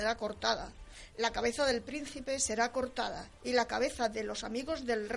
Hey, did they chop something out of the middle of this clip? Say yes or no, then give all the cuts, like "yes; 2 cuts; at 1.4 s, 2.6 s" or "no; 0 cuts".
no; 0 cuts